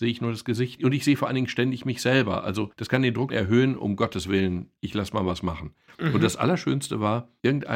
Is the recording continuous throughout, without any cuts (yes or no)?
no